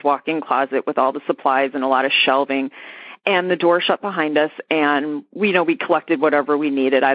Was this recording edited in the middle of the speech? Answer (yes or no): no